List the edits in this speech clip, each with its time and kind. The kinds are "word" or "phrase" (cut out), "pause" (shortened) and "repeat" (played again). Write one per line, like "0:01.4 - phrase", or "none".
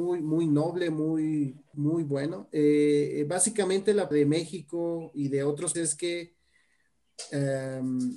0:01.7 - word
0:04.1 - word
0:05.7 - word